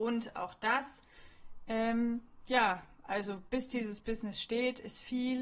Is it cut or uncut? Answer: uncut